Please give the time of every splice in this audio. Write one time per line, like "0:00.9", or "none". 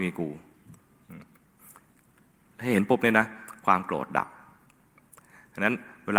none